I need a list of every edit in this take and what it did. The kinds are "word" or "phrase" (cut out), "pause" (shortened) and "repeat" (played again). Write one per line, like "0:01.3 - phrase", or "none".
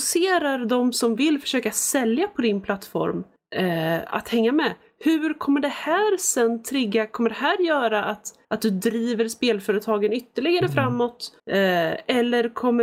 0:03.4 - pause
0:08.4 - pause
0:11.4 - pause

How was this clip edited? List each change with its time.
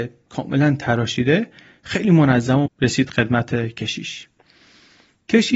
0:02.7 - word

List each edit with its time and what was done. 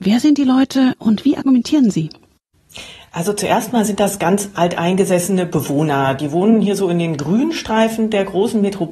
none

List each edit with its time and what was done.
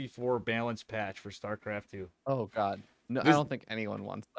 none

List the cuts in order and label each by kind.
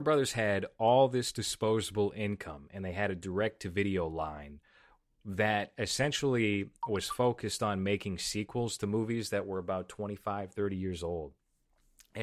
none

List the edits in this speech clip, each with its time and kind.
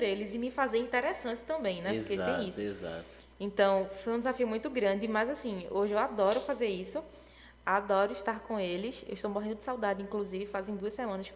none

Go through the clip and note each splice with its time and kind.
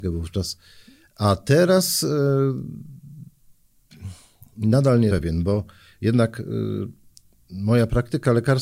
0:05.1 - word

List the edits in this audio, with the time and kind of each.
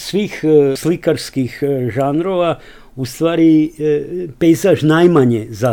none

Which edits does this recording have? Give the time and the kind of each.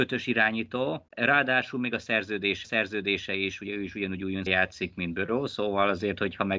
0:01.1 - pause
0:02.6 - repeat
0:04.5 - word

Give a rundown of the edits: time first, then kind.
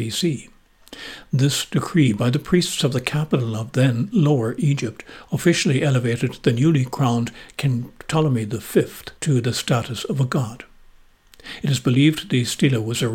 0:09.2 - pause

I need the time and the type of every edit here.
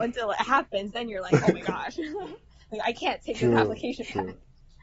none

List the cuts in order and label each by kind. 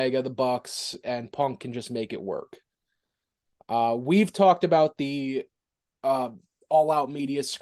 none

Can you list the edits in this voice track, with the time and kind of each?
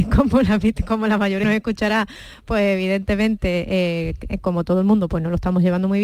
0:01.4 - phrase

